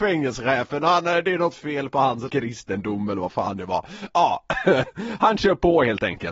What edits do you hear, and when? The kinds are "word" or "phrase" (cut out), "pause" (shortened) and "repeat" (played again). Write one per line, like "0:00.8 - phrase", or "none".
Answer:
0:02.3 - phrase